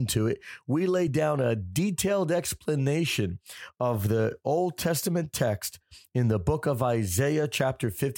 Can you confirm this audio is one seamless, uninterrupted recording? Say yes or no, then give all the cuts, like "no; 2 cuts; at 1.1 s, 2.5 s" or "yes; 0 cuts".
yes; 0 cuts